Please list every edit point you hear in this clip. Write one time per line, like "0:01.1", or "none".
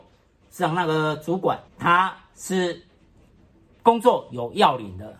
0:01.7